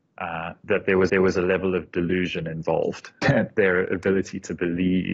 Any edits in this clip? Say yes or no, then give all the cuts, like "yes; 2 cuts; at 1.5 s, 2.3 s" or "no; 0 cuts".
yes; 2 cuts; at 1.1 s, 3.2 s